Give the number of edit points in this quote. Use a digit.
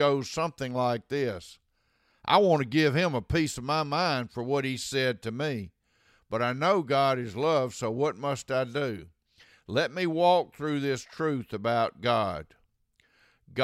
0